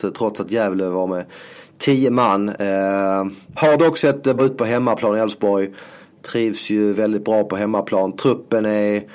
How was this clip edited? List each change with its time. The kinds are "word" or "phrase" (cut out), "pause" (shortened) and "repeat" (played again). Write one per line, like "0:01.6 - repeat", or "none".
0:04.4 - word